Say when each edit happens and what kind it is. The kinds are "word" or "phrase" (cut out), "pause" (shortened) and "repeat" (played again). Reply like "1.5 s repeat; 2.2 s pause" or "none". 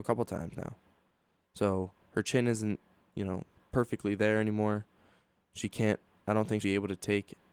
6.6 s word